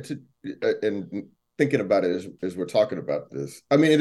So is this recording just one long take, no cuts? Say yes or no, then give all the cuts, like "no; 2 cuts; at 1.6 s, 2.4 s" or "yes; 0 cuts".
yes; 0 cuts